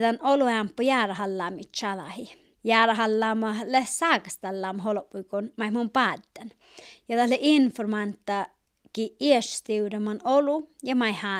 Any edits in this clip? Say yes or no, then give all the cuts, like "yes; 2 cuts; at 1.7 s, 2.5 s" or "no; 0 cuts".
yes; 1 cut; at 2.5 s